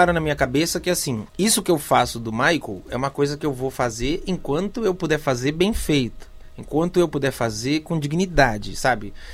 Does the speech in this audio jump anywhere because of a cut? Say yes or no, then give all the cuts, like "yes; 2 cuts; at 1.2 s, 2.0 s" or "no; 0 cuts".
yes; 1 cut; at 1.3 s